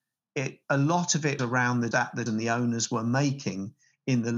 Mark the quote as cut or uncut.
cut